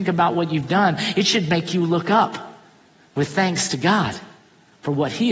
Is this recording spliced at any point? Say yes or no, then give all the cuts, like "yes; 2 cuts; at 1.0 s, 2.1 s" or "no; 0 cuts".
no; 0 cuts